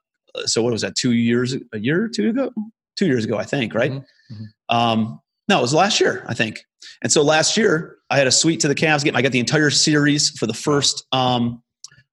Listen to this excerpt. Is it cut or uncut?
cut